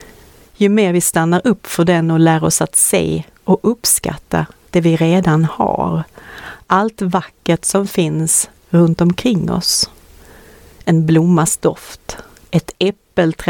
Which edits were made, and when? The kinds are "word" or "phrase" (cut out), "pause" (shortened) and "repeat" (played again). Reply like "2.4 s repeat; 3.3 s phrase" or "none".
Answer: none